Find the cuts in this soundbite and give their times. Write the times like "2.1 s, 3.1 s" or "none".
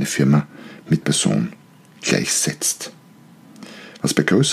1.0 s

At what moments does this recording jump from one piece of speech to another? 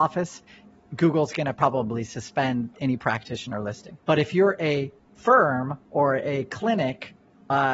4.0 s, 5.8 s

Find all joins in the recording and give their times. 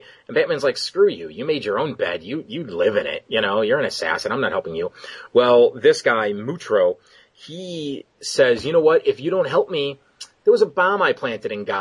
none

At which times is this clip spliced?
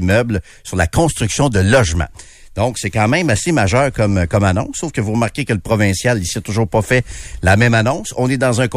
none

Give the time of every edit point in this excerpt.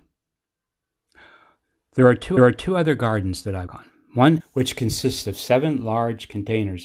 2.4 s, 3.7 s, 4.4 s

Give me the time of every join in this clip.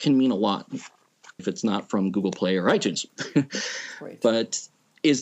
1.4 s

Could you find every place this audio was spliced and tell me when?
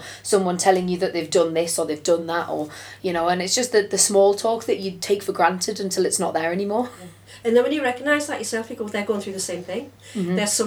none

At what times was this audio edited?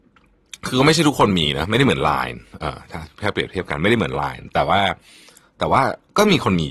none

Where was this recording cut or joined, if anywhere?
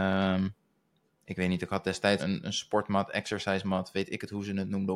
2.2 s

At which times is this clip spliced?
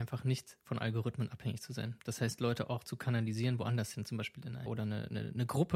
4.7 s

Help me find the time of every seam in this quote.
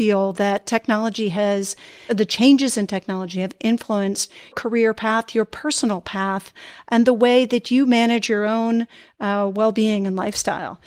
2.1 s, 4.5 s

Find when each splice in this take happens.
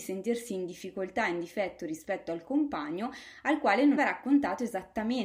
4.0 s

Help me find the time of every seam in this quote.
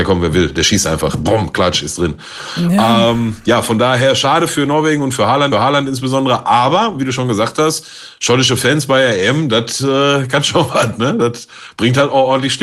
5.5 s

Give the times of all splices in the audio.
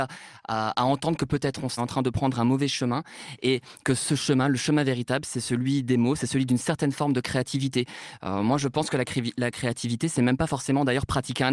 1.8 s

